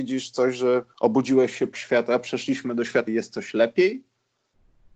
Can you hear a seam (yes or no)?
yes